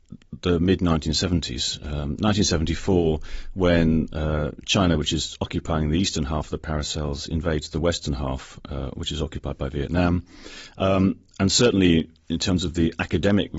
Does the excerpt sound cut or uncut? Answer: uncut